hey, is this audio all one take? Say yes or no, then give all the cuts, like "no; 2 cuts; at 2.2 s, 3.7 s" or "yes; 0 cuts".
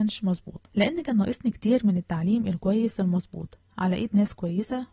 yes; 0 cuts